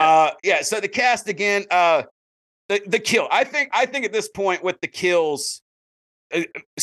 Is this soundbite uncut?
yes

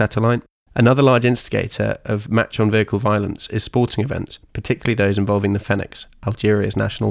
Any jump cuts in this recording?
yes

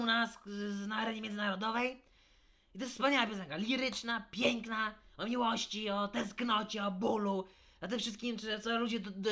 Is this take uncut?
yes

